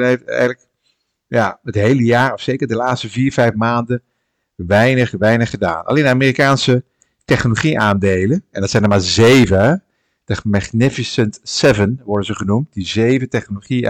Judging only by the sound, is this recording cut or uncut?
uncut